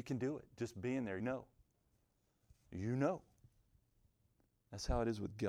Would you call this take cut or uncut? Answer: cut